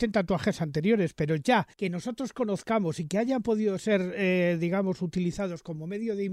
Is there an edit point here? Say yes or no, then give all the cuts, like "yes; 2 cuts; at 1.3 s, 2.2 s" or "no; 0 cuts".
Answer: yes; 1 cut; at 1.7 s